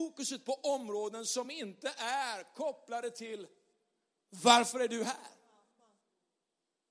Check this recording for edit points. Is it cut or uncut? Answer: uncut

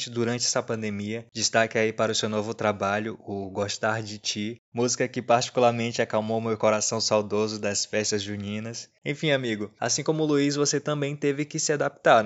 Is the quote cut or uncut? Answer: uncut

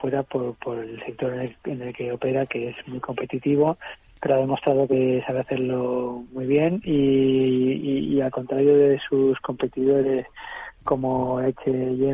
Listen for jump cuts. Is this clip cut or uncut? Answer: uncut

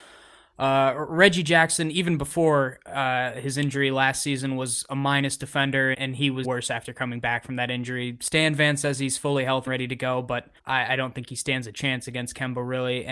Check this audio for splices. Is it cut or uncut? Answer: cut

